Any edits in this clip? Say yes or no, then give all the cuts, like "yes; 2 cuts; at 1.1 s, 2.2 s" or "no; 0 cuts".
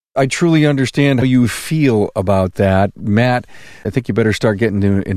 yes; 3 cuts; at 1.2 s, 2.9 s, 3.8 s